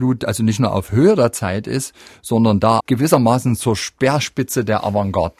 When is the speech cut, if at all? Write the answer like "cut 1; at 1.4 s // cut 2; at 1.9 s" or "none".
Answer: cut 1; at 2.8 s